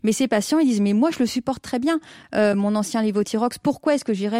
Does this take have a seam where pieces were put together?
no; 0 cuts

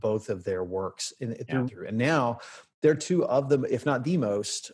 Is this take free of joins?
no; 1 cut; at 1.7 s

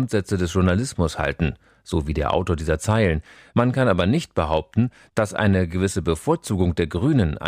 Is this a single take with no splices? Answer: yes; 0 cuts

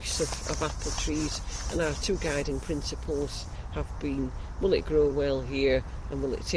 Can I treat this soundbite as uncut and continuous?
yes; 0 cuts

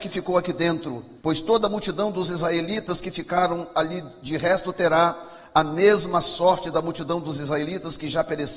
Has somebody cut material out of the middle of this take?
yes; 1 cut; at 1.2 s

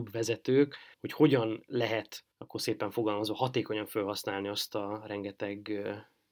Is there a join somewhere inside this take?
yes; 2 cuts; at 0.9 s, 2.3 s

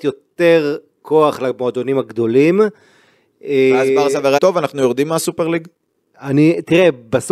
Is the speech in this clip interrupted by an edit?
yes; 1 cut; at 4.4 s

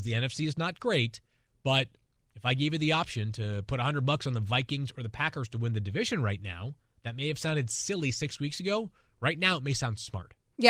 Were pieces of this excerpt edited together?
no; 0 cuts

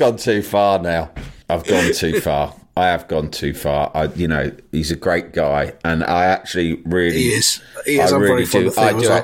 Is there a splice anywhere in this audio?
yes; 1 cut; at 1.4 s

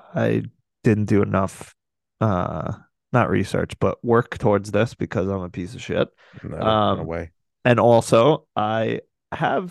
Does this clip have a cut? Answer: no; 0 cuts

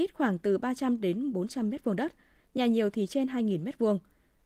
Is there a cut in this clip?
no; 0 cuts

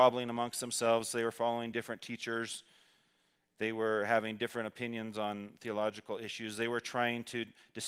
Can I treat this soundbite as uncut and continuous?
yes; 0 cuts

